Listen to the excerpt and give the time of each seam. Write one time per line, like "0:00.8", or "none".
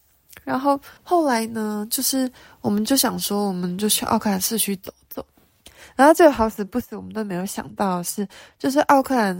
0:01.0